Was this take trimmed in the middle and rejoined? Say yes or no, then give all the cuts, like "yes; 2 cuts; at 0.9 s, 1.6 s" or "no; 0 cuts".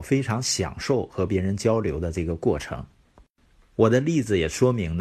no; 0 cuts